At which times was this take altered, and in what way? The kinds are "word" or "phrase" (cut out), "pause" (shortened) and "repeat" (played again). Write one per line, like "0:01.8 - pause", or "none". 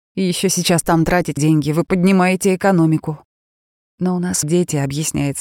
0:01.4 - word
0:04.4 - word